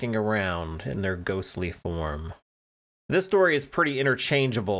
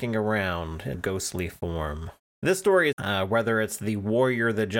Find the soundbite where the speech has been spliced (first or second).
second